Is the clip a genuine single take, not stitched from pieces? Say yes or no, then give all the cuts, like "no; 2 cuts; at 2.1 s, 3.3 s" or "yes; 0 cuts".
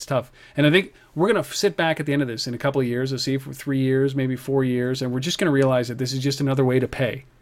yes; 0 cuts